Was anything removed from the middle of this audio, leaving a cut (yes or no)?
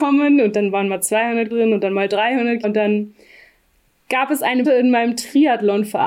yes